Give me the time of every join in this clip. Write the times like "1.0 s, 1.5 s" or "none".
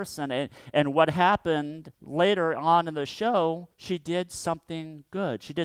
1.9 s, 3.7 s